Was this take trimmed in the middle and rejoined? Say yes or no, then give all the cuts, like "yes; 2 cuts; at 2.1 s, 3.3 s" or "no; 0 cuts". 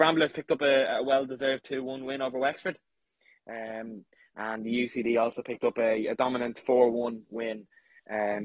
no; 0 cuts